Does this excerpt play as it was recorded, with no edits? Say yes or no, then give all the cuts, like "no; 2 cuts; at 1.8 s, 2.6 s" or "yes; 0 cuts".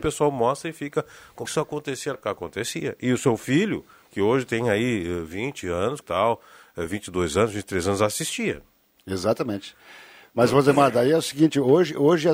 no; 3 cuts; at 1.4 s, 2.1 s, 6.0 s